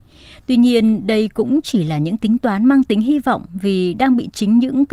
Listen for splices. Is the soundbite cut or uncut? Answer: uncut